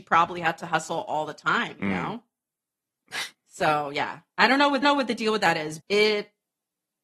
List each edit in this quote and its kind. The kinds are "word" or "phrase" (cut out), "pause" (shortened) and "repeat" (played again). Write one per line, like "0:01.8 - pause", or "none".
0:03.3 - pause
0:04.8 - repeat
0:05.8 - word

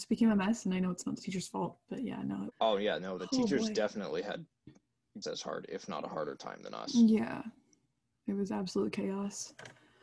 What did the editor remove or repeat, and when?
0:02.5 - word
0:05.2 - word

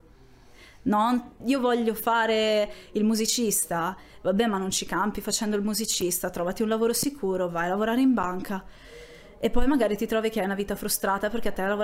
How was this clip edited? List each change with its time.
0:01.4 - word

